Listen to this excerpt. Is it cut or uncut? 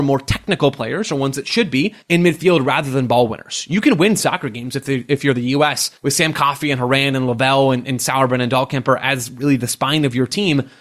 cut